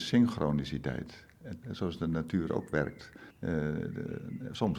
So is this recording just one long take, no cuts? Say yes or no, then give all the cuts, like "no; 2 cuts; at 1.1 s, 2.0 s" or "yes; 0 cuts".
no; 2 cuts; at 1.6 s, 3.3 s